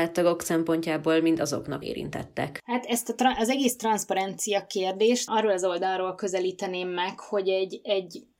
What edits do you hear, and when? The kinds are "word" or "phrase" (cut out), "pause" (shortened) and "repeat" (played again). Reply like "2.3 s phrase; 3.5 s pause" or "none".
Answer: 1.8 s phrase; 5.3 s phrase